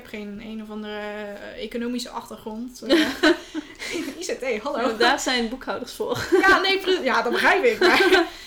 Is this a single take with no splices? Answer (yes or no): yes